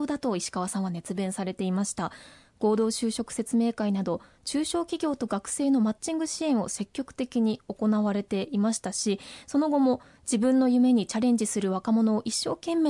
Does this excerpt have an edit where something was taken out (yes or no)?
no